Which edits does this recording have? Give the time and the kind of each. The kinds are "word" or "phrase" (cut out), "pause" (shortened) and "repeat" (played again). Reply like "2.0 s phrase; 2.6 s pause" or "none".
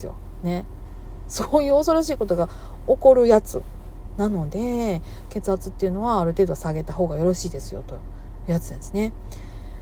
none